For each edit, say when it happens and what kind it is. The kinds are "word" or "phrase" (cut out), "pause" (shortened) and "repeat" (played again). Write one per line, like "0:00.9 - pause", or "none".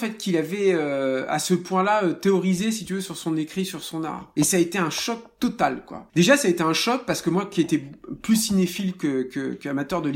none

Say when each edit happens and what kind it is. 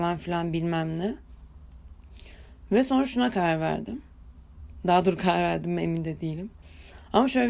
none

